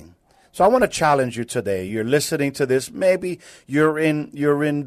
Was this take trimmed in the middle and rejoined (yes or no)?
no